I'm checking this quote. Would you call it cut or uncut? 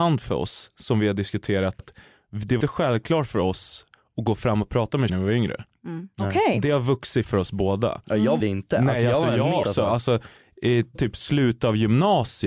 cut